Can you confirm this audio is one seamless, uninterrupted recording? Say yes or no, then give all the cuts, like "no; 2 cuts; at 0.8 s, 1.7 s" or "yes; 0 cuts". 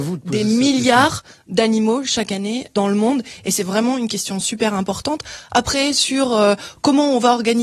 yes; 0 cuts